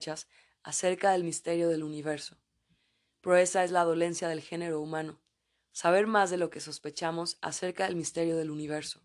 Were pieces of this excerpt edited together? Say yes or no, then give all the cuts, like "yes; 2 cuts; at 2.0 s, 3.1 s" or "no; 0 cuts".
no; 0 cuts